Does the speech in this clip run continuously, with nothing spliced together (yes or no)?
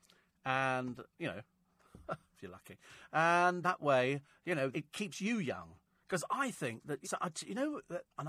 no